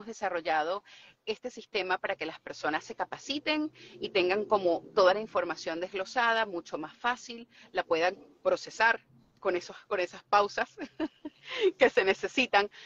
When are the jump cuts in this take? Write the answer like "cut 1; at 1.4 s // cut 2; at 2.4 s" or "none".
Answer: none